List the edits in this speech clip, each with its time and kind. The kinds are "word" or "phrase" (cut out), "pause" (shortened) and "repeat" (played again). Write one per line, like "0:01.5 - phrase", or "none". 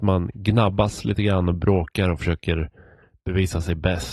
none